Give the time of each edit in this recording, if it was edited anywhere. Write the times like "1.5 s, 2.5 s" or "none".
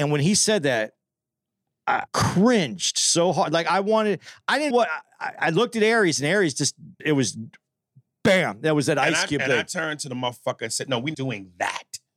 2.1 s, 4.7 s, 7.0 s, 11.1 s